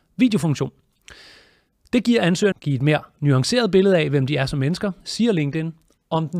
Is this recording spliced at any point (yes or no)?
yes